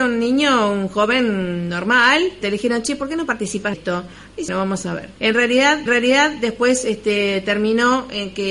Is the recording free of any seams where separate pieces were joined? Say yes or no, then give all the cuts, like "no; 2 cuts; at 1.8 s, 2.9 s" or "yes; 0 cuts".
no; 5 cuts; at 2.4 s, 3.7 s, 4.5 s, 5.2 s, 5.9 s